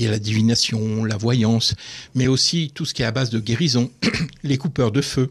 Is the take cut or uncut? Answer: uncut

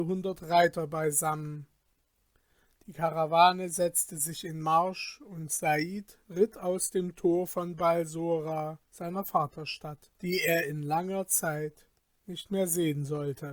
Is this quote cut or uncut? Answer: cut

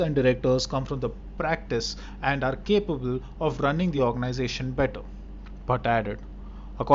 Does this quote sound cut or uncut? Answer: uncut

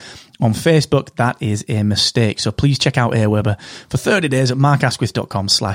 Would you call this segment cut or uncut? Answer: uncut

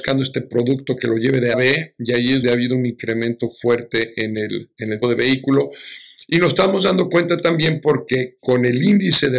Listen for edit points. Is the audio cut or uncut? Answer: cut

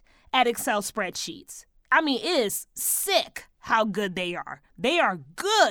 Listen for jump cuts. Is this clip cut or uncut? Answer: cut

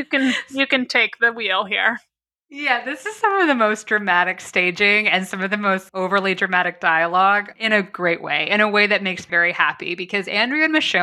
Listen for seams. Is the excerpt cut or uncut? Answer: cut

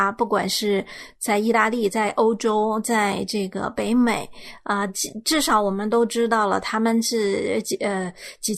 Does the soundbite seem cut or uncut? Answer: uncut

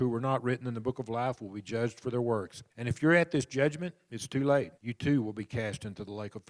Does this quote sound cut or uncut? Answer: cut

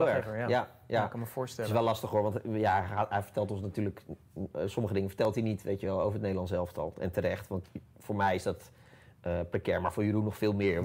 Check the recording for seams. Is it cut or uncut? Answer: uncut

